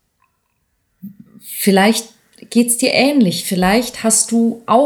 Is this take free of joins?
yes; 0 cuts

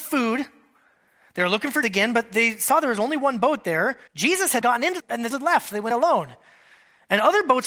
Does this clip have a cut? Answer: yes; 6 cuts; at 1.8 s, 4.1 s, 4.6 s, 5.0 s, 5.3 s, 5.9 s

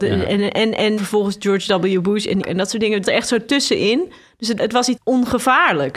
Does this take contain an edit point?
yes; 5 cuts; at 1.0 s, 2.4 s, 3.0 s, 4.6 s, 5.0 s

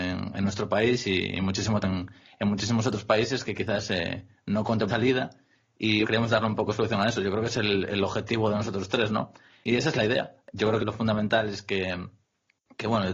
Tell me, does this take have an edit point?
yes; 4 cuts; at 1.8 s, 4.9 s, 6.0 s, 10.8 s

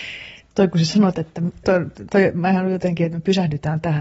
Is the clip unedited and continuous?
no; 1 cut; at 1.6 s

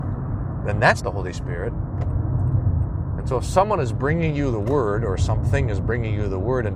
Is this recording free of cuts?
no; 1 cut; at 1.0 s

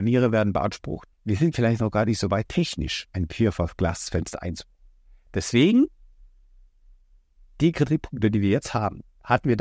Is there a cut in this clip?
yes; 1 cut; at 1.1 s

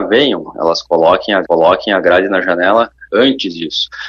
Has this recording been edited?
yes; 1 cut; at 1.4 s

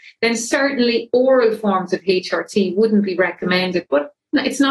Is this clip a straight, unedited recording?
yes; 0 cuts

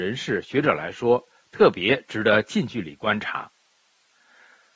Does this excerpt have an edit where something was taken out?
no; 0 cuts

